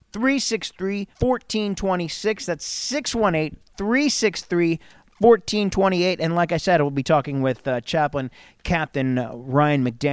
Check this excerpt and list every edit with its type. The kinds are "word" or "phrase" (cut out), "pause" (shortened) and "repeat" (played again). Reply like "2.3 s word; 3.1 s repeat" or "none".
1.1 s pause

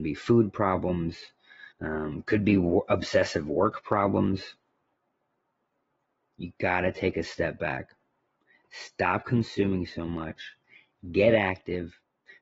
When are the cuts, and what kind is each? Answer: 1.7 s pause

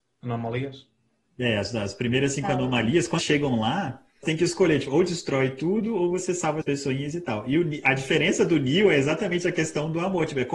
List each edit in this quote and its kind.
3.2 s word; 4.2 s word; 6.6 s word

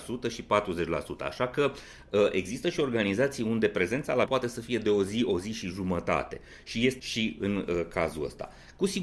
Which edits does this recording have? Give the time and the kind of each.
4.3 s word; 7.0 s word

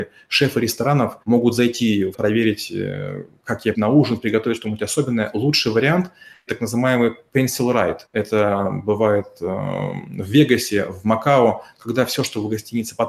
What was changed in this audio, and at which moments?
1.2 s pause; 2.1 s word; 3.7 s phrase; 6.5 s word; 8.1 s pause

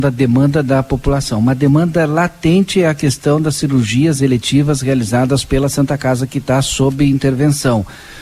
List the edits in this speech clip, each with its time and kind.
none

